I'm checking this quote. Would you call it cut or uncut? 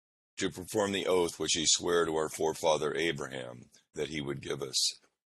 uncut